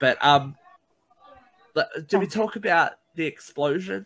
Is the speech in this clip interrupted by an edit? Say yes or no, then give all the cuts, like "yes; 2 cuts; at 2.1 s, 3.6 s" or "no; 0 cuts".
no; 0 cuts